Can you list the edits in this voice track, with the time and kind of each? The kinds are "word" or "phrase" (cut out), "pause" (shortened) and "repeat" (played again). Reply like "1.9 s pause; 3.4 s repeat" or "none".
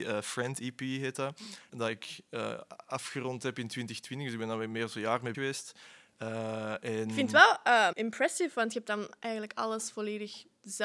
1.7 s word; 5.3 s word; 7.9 s word